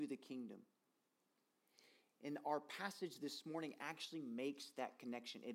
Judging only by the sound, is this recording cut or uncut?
uncut